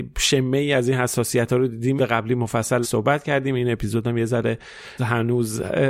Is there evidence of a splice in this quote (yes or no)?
yes